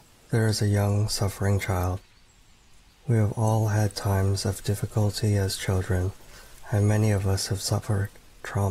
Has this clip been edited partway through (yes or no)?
no